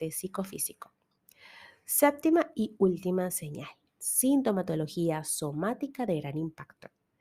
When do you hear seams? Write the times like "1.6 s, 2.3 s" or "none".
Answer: none